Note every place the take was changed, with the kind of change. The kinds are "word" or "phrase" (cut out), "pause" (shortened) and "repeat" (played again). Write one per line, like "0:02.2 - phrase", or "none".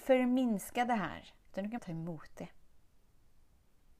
0:01.4 - pause
0:01.8 - word